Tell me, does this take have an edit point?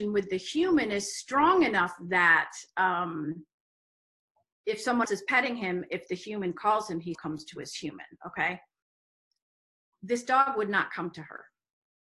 yes; 2 cuts; at 5.0 s, 7.1 s

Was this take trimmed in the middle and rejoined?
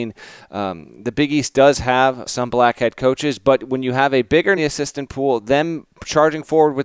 yes; 2 cuts; at 2.3 s, 4.6 s

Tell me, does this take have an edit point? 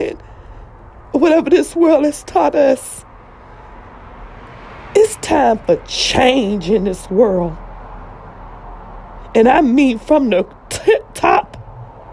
no; 0 cuts

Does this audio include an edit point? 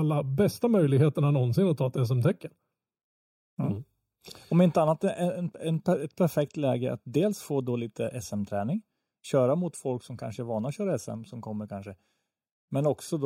no; 0 cuts

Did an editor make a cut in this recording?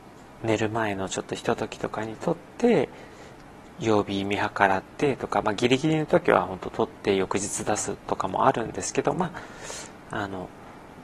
no; 0 cuts

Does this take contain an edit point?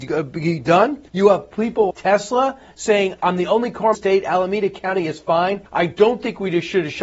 yes; 4 cuts; at 1.1 s, 1.9 s, 3.9 s, 5.7 s

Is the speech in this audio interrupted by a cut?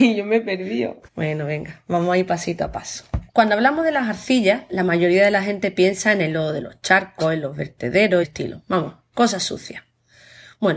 yes; 3 cuts; at 1.1 s, 3.3 s, 8.2 s

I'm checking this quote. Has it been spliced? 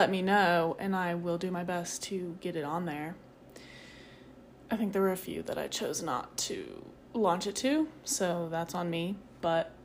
yes; 1 cut; at 7.0 s

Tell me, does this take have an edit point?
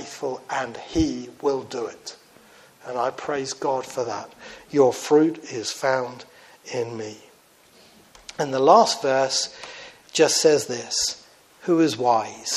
no; 0 cuts

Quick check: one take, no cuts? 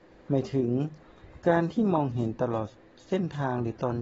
yes; 0 cuts

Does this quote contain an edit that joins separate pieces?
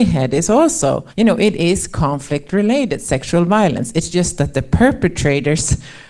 yes; 1 cut; at 1.1 s

